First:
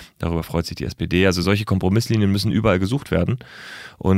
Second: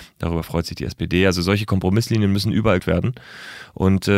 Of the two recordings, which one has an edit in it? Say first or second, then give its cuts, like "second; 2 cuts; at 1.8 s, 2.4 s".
second; 1 cut; at 2.8 s